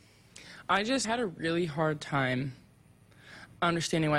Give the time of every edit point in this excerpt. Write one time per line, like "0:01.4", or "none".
0:01.0

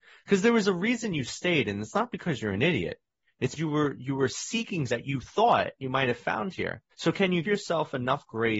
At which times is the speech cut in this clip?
0:03.6
0:04.9
0:06.9
0:07.4

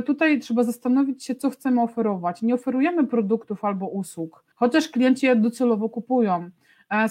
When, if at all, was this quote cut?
0:04.5

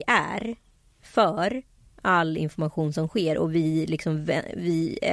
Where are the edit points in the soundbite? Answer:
none

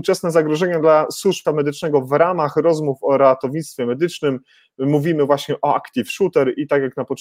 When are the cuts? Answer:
0:01.4

